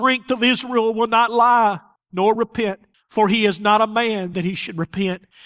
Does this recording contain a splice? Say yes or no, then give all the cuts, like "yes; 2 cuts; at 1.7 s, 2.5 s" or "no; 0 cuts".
no; 0 cuts